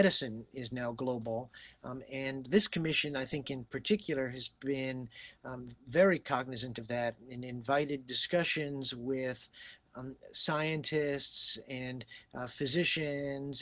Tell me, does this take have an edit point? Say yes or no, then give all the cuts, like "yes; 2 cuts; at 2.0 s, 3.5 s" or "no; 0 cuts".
yes; 1 cut; at 5.8 s